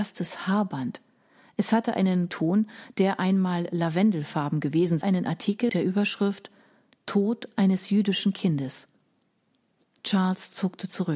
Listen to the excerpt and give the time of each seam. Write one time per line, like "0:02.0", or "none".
0:02.3
0:05.0
0:05.7